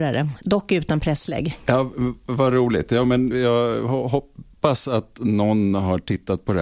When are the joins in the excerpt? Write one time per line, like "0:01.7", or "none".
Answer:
0:03.3